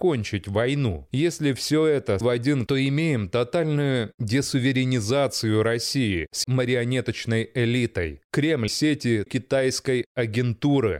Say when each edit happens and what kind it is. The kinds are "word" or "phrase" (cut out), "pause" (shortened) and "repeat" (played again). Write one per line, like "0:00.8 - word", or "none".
0:02.2 - word
0:02.7 - word
0:06.4 - word
0:08.7 - word
0:09.3 - word

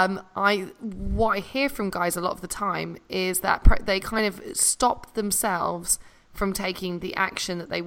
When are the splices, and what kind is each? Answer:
none

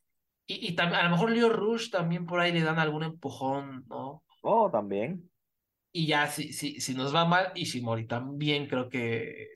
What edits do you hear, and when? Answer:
none

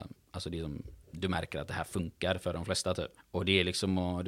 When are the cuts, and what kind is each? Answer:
0:01.0 - pause
0:03.2 - pause

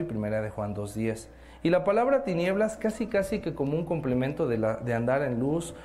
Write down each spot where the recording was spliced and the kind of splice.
none

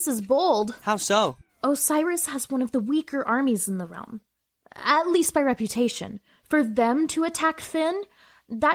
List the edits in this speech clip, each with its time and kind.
none

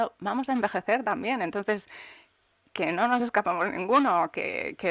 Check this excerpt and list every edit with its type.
none

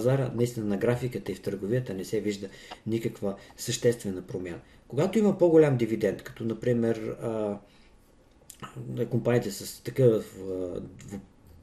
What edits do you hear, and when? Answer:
none

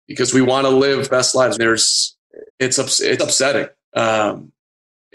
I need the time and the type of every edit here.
0:01.1 - phrase
0:01.6 - phrase
0:02.5 - pause
0:03.2 - word

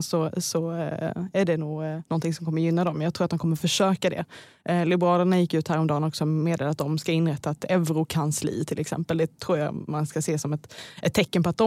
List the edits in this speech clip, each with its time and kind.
0:02.1 - pause

